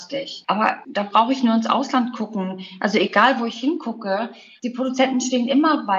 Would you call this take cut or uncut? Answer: uncut